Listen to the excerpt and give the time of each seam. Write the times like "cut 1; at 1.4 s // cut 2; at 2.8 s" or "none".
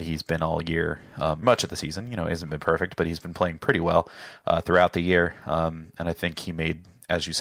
cut 1; at 1.4 s